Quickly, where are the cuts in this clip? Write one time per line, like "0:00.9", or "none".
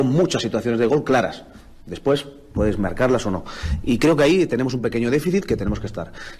none